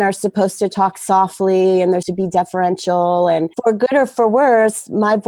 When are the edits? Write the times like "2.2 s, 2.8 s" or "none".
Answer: 2.0 s, 3.5 s